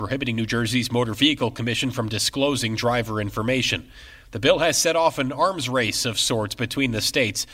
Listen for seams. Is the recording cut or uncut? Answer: uncut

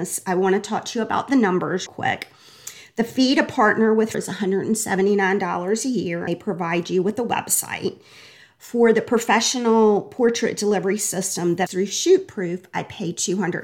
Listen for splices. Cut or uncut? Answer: cut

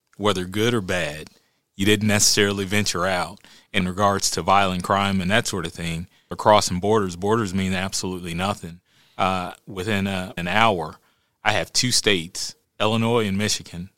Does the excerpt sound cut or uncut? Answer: cut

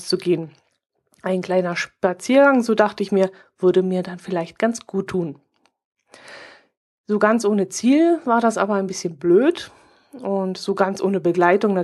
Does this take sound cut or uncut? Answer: uncut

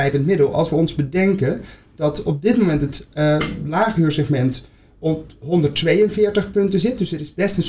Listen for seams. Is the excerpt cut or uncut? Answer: uncut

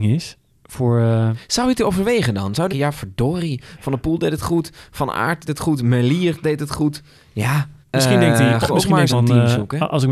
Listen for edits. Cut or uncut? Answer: cut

